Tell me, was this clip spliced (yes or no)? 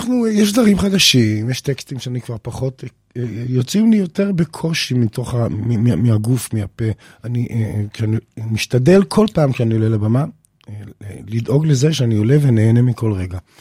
yes